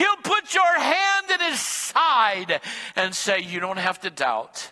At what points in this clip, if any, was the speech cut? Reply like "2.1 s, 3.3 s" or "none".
none